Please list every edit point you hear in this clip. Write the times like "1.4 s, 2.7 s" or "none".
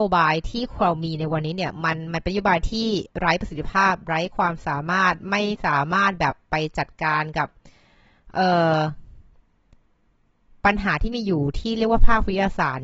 3.1 s